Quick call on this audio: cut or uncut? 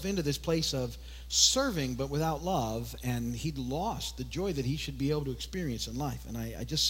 uncut